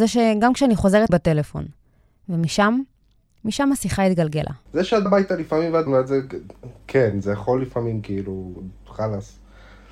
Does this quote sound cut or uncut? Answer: cut